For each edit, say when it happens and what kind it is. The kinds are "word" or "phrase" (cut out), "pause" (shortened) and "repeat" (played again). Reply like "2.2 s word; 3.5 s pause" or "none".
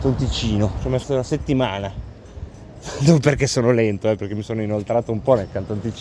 1.0 s word